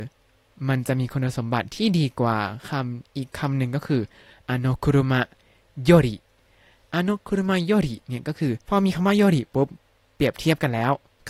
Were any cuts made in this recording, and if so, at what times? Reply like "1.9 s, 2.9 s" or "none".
8.6 s